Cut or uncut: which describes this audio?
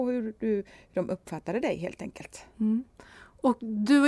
uncut